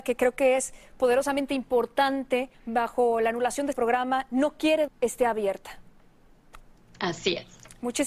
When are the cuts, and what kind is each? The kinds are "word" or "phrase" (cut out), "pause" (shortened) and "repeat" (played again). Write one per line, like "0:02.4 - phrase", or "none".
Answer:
0:02.5 - pause
0:03.7 - word
0:04.9 - phrase